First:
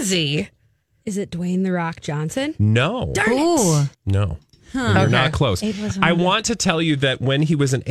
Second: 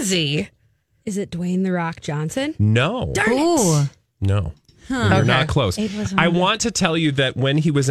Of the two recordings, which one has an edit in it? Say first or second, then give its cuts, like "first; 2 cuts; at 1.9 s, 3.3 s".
first; 1 cut; at 3.9 s